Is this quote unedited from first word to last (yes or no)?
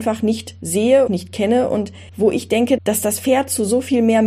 no